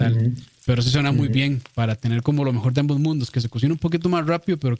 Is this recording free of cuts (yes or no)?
yes